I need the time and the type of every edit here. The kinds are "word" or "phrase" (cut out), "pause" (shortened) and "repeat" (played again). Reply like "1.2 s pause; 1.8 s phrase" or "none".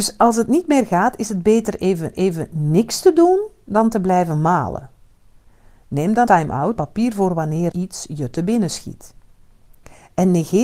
2.1 s repeat; 6.3 s word; 6.8 s phrase; 7.7 s word

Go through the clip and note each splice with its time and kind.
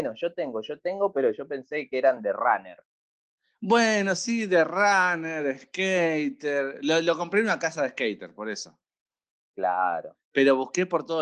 none

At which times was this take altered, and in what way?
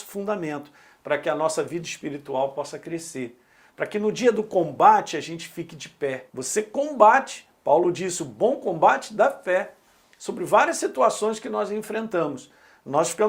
6.3 s pause

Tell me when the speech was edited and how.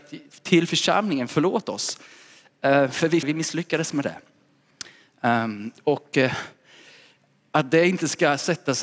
3.2 s word

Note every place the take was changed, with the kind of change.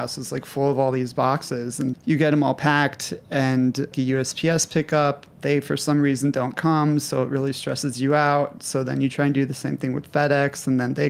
1.9 s word; 3.9 s phrase; 5.3 s pause

